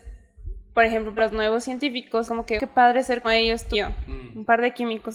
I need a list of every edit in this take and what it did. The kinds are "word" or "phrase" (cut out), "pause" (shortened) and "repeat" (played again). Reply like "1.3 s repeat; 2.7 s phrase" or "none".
1.2 s word; 2.3 s word; 2.6 s word; 3.2 s word; 3.7 s word

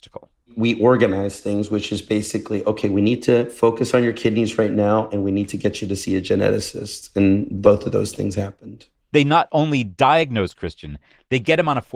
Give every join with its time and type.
none

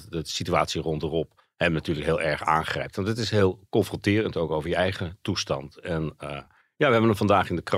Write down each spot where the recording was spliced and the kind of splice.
none

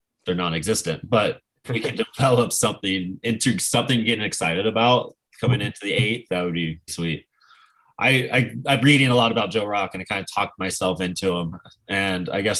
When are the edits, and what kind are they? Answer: 1.6 s word; 6.3 s word; 6.9 s word; 8.8 s word

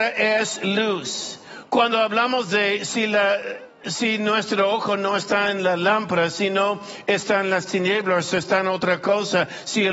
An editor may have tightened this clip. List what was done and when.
none

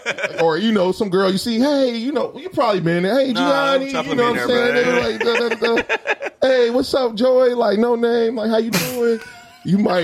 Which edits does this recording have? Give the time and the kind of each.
none

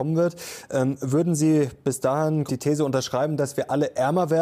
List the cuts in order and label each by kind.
2.5 s word

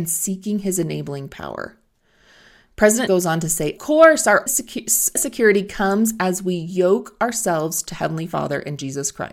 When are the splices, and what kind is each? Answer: 3.1 s word; 3.8 s word; 4.5 s word; 5.2 s word

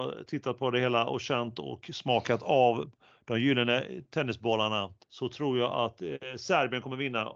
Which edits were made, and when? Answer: 5.0 s pause

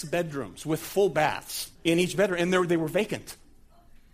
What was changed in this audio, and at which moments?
1.7 s pause

